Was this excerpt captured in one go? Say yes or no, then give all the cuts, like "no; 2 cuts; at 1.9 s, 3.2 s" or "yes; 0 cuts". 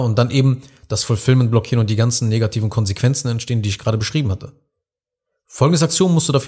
yes; 0 cuts